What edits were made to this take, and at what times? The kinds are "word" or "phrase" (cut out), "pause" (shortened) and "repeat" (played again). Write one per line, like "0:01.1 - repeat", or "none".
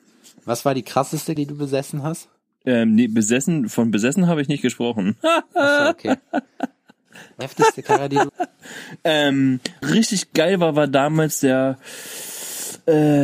0:01.4 - word
0:07.4 - word
0:08.3 - word
0:09.8 - word